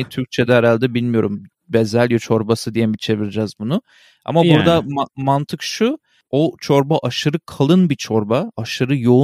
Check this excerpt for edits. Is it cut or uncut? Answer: uncut